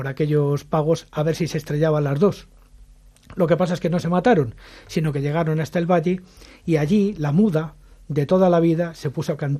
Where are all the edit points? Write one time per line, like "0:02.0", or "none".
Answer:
none